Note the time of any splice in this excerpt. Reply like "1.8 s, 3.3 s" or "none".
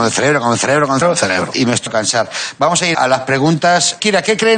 1.0 s, 1.9 s, 2.9 s